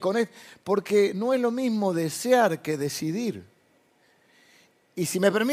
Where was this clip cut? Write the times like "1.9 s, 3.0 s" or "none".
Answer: 3.8 s